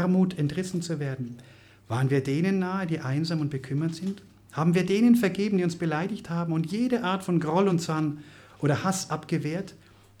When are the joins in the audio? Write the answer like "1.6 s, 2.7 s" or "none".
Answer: none